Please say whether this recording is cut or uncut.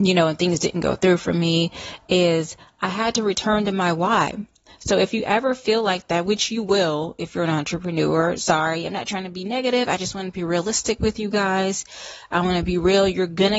uncut